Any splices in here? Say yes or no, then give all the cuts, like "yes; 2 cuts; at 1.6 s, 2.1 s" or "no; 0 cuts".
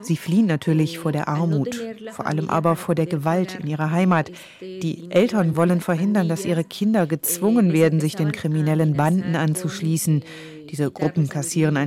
no; 0 cuts